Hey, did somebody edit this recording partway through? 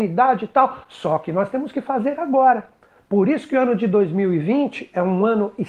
no; 0 cuts

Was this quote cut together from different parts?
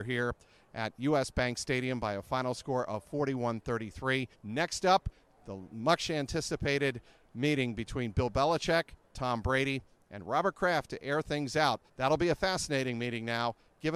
yes; 2 cuts; at 4.3 s, 11.9 s

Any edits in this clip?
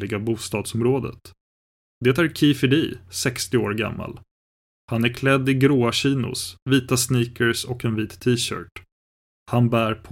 no; 0 cuts

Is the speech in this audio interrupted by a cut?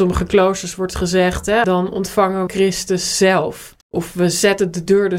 yes; 3 cuts; at 1.6 s, 2.5 s, 3.8 s

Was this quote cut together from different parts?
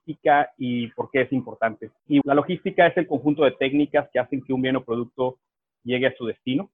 yes; 1 cut; at 2.2 s

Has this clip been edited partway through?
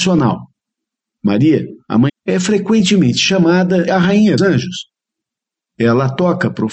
yes; 3 cuts; at 2.1 s, 3.9 s, 4.4 s

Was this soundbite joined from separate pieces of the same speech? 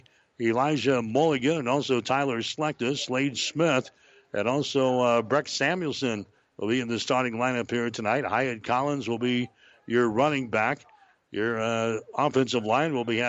no; 0 cuts

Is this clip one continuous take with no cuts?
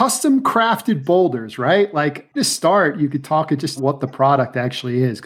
no; 2 cuts; at 2.4 s, 3.8 s

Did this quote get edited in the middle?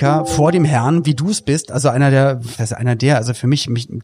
yes; 1 cut; at 2.6 s

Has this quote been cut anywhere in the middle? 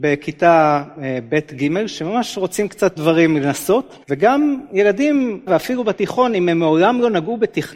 yes; 3 cuts; at 3.0 s, 4.0 s, 5.5 s

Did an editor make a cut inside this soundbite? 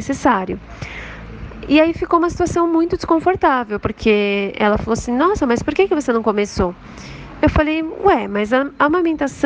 no; 0 cuts

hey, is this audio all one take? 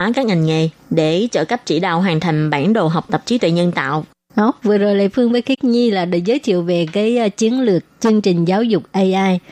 yes; 0 cuts

